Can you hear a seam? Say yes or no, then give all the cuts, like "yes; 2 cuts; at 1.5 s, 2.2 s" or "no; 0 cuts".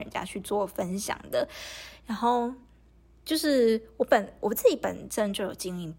no; 0 cuts